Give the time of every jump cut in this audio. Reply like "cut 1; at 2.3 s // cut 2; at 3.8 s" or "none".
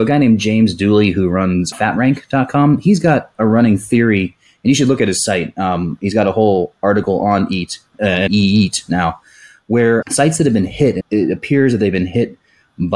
cut 1; at 1.7 s // cut 2; at 8.3 s // cut 3; at 10.0 s // cut 4; at 11.0 s